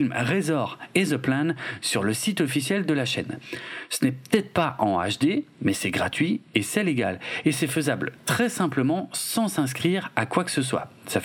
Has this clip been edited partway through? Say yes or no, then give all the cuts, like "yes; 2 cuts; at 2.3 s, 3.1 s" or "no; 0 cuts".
no; 0 cuts